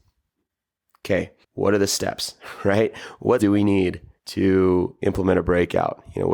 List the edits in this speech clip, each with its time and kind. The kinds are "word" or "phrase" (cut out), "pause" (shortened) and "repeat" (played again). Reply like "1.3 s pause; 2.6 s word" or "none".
1.4 s pause; 3.4 s word; 4.2 s pause